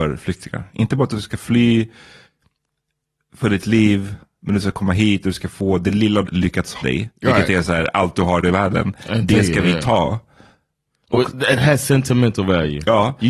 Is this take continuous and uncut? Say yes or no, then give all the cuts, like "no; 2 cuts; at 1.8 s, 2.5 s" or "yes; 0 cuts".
no; 3 cuts; at 6.3 s, 6.8 s, 8.4 s